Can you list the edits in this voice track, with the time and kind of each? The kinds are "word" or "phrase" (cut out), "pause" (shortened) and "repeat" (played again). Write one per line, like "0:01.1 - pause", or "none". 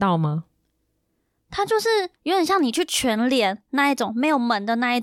0:02.1 - pause